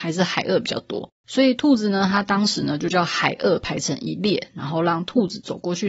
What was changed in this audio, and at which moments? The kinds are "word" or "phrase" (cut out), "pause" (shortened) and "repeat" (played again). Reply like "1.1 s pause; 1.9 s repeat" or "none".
1.2 s pause